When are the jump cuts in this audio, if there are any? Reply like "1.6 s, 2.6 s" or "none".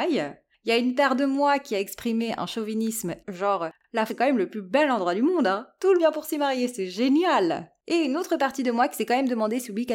3.2 s, 4.1 s, 6.0 s

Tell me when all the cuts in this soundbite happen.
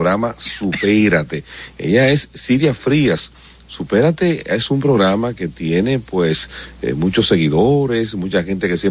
none

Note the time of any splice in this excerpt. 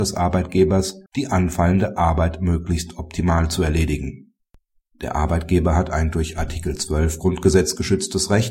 1.1 s

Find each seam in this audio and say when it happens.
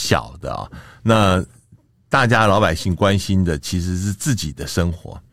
none

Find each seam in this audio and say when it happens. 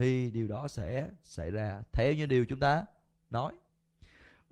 none

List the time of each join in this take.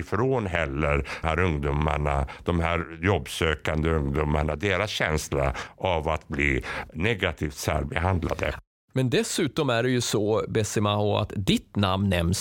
1.2 s

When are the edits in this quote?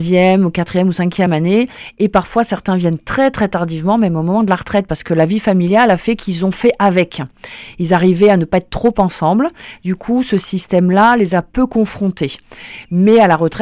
none

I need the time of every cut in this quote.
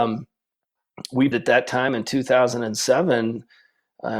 1.3 s

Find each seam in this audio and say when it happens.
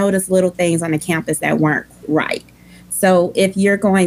2.0 s

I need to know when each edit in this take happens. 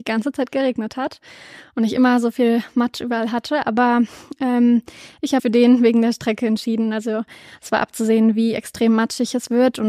5.4 s

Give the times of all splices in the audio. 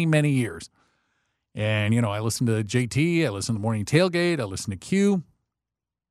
none

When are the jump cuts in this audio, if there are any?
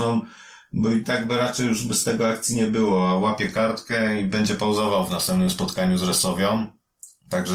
none

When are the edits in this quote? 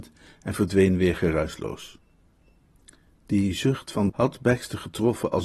4.1 s

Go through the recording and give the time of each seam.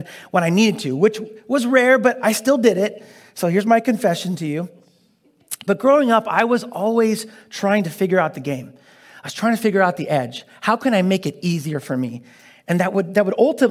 none

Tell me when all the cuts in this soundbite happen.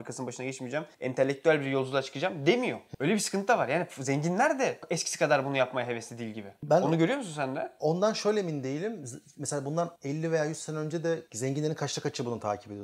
10.0 s

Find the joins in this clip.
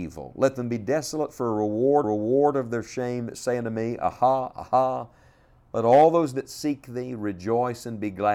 2.0 s

